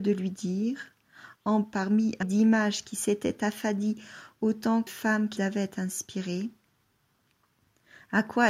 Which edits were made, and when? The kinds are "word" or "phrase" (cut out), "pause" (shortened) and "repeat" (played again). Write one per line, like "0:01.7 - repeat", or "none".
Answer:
0:01.6 - phrase
0:02.2 - word
0:04.9 - word
0:05.4 - word